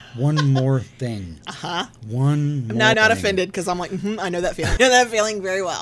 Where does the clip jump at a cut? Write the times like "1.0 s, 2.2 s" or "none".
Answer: 2.9 s, 4.8 s